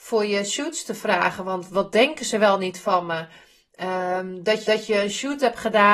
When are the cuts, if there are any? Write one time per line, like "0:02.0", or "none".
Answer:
0:01.7
0:04.7